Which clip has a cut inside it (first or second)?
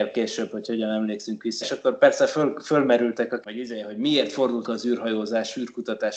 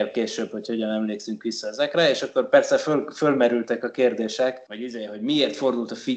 first